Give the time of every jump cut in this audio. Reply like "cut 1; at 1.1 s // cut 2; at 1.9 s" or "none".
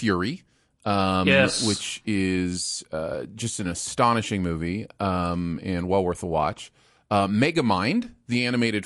none